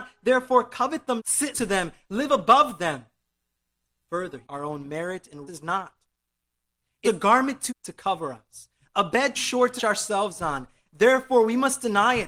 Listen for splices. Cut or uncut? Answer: cut